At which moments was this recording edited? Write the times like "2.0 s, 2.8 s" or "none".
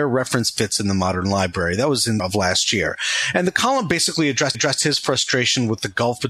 2.2 s, 4.5 s